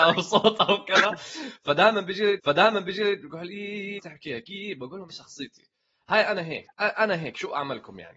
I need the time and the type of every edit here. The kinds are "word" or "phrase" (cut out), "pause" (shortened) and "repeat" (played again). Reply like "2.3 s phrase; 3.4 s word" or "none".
2.4 s repeat; 4.0 s word; 5.1 s phrase; 6.7 s pause